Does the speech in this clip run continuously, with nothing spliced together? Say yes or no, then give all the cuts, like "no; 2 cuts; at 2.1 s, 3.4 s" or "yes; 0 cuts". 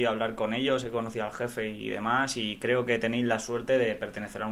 yes; 0 cuts